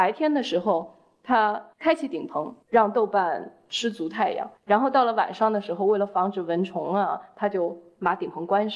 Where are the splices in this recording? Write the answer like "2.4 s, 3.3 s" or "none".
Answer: 1.7 s, 2.6 s, 4.6 s